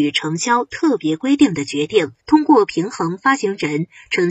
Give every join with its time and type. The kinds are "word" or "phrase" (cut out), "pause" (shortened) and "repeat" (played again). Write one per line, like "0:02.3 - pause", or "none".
0:02.2 - pause